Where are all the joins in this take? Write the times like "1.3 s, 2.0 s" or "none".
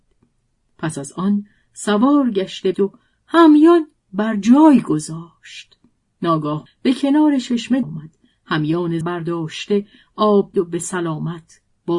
2.7 s, 6.7 s, 7.8 s, 9.0 s, 10.5 s